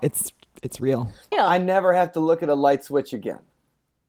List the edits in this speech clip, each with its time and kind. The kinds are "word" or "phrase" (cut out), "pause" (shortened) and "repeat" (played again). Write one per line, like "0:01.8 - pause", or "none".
0:01.3 - word